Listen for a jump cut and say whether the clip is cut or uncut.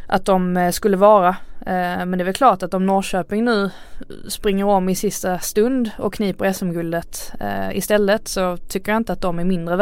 uncut